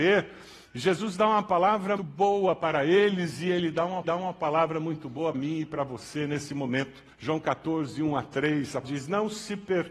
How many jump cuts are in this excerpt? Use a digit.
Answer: 5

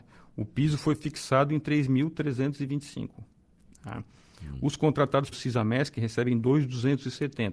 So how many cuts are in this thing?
1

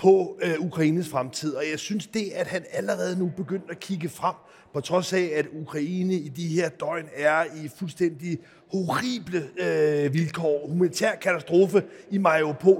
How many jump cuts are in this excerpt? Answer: 0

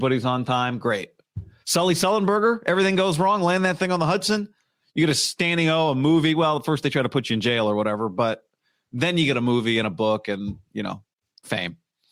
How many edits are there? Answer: 0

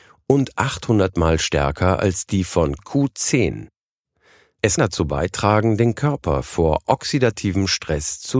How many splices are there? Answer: 2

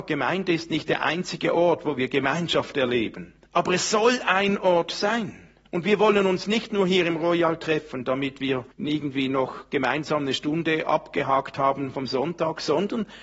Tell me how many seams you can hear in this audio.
3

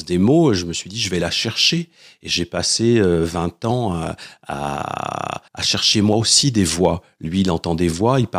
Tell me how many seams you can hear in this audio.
1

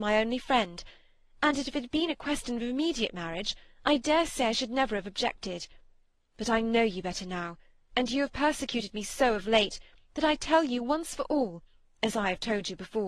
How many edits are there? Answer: 0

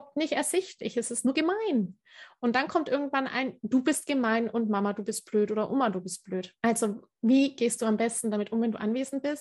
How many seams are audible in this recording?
1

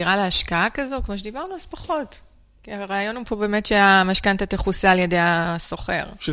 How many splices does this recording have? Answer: 0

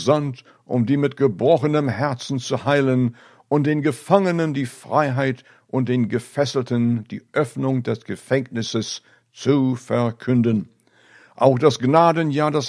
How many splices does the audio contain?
0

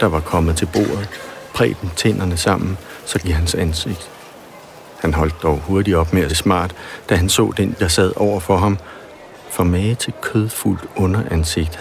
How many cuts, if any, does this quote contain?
4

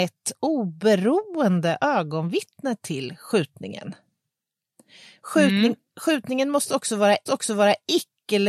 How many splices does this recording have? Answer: 1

